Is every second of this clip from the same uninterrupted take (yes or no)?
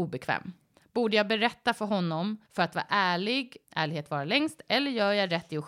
no